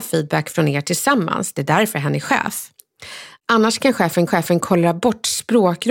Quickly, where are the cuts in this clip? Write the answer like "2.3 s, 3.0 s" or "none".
4.3 s